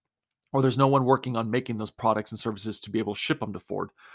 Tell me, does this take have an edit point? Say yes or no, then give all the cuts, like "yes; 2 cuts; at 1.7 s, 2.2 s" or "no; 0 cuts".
no; 0 cuts